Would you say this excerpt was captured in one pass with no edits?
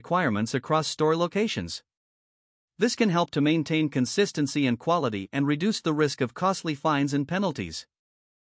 yes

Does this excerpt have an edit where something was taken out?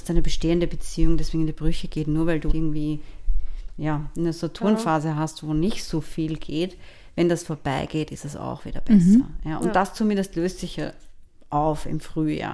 yes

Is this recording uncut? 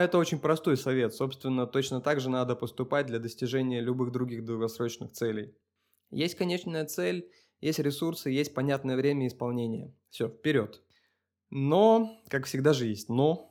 yes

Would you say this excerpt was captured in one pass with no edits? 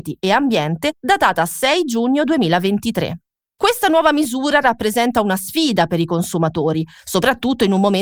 yes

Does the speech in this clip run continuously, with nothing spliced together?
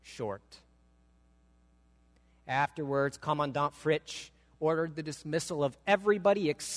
yes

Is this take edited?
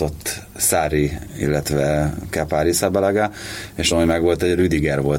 yes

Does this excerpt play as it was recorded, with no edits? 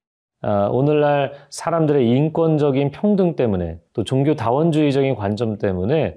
no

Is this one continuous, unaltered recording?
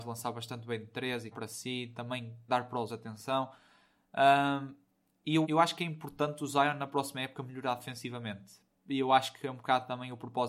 no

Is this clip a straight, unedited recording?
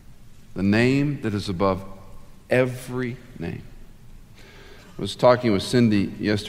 yes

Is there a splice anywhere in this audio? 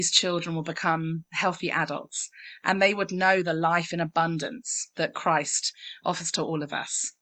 no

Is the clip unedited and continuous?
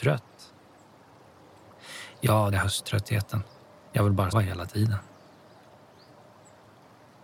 no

